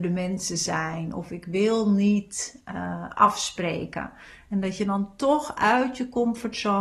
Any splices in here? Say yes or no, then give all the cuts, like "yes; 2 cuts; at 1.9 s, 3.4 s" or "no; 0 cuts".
no; 0 cuts